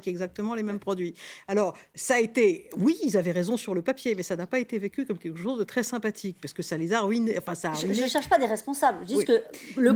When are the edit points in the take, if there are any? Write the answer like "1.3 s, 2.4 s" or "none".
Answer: none